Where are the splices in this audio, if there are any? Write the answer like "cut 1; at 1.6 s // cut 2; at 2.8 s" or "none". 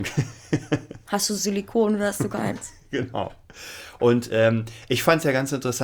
none